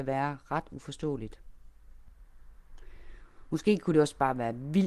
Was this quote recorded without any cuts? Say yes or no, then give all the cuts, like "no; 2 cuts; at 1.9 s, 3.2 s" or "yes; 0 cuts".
yes; 0 cuts